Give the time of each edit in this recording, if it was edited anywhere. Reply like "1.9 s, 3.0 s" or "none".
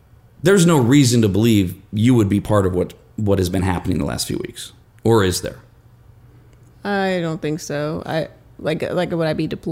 4.8 s